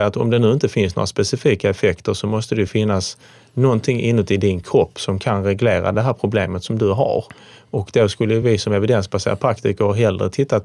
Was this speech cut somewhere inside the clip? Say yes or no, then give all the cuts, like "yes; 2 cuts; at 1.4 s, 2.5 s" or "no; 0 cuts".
no; 0 cuts